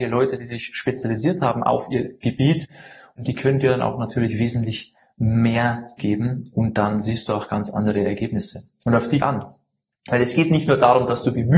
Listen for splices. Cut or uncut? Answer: cut